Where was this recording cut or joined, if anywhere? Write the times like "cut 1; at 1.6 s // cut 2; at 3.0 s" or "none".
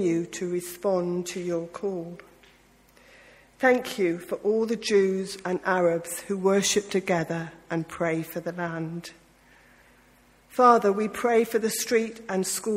none